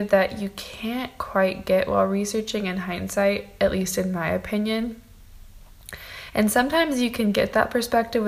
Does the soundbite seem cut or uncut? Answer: uncut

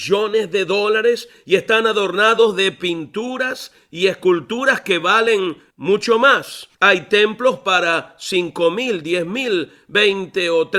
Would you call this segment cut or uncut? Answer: cut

